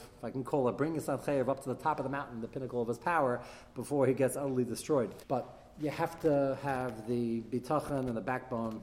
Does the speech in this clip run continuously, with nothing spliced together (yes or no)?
no